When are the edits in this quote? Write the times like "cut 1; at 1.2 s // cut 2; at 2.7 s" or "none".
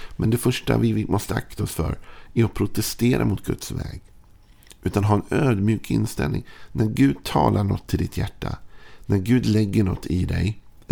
none